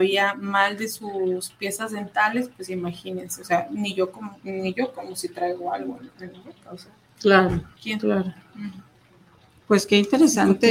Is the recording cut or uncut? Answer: uncut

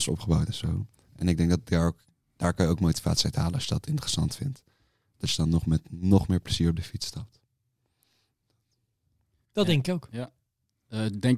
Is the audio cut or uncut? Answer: uncut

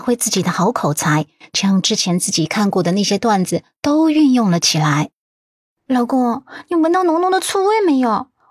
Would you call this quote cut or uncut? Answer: uncut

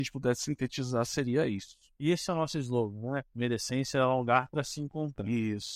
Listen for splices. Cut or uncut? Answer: uncut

